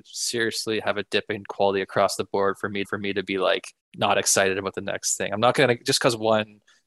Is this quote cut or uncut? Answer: cut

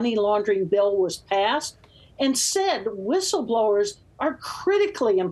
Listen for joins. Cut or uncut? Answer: uncut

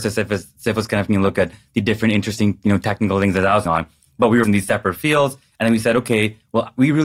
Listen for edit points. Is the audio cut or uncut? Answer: cut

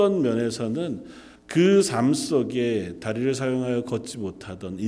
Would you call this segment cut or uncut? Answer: cut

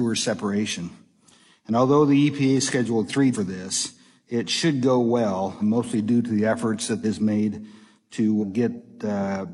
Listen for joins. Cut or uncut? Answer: cut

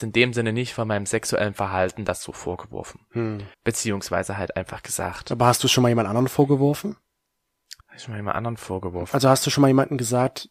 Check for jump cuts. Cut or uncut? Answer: cut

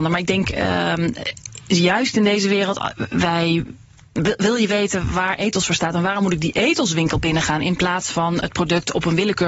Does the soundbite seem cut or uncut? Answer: uncut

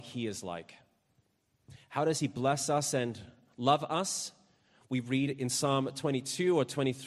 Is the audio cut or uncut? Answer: uncut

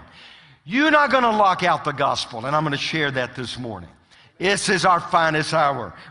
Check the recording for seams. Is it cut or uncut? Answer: uncut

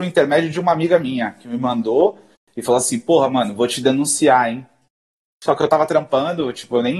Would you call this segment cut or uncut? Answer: uncut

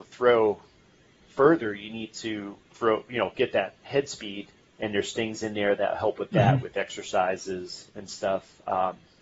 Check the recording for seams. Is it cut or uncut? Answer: cut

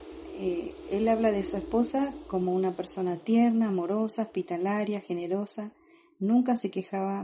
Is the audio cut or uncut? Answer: uncut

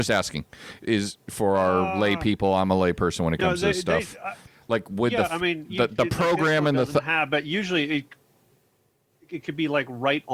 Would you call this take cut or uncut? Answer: cut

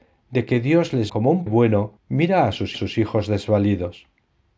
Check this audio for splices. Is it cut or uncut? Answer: cut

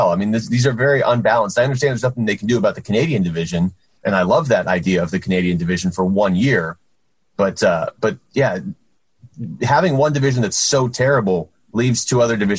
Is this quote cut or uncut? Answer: uncut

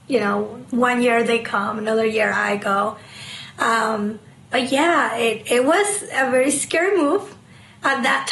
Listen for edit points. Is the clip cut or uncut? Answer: uncut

